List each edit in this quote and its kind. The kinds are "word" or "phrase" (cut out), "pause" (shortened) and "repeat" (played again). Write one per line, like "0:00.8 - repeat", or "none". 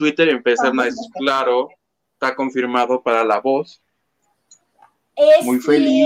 none